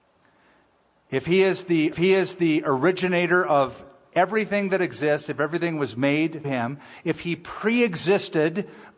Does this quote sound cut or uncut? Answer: cut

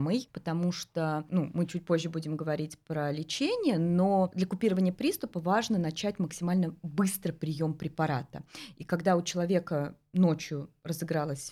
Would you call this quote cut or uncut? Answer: uncut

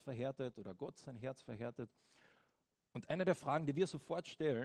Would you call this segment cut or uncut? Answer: uncut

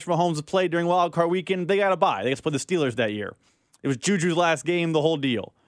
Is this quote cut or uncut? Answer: uncut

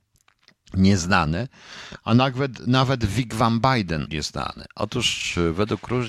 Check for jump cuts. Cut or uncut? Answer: cut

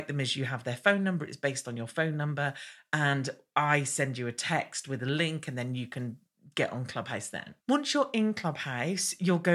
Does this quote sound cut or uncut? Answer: cut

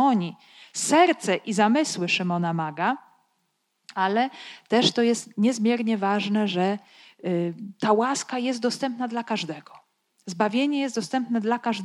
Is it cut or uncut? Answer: uncut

